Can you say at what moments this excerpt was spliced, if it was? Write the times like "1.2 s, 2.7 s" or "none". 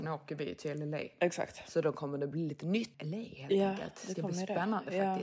2.9 s